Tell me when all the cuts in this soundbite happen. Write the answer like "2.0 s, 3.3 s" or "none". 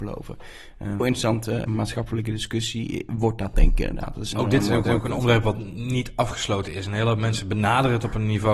1.0 s, 1.7 s, 4.3 s, 4.9 s